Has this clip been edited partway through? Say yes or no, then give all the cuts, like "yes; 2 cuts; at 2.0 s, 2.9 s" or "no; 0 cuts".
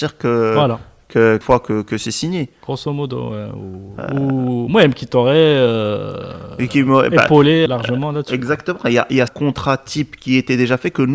yes; 4 cuts; at 1.4 s, 6.7 s, 7.7 s, 9.3 s